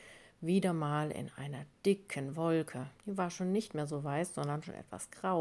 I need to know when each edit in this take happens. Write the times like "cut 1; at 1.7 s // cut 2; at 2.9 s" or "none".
cut 1; at 3.0 s